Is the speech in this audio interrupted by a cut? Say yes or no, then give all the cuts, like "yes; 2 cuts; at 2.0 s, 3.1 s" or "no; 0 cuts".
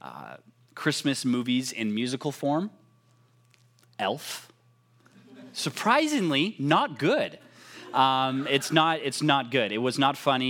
no; 0 cuts